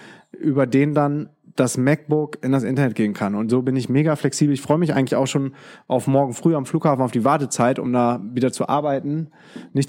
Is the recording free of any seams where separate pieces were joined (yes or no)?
yes